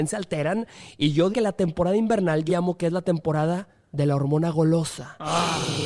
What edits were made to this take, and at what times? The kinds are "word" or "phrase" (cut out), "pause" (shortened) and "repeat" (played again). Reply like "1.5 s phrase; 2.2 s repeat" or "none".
1.3 s word; 2.5 s word